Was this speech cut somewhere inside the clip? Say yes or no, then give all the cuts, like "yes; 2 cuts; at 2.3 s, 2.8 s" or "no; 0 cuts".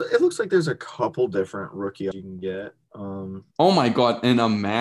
yes; 2 cuts; at 2.1 s, 3.5 s